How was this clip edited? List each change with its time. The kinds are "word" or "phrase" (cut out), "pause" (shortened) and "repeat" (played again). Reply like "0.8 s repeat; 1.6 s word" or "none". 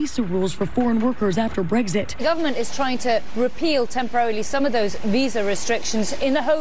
none